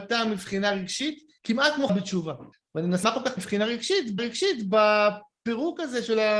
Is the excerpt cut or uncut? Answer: cut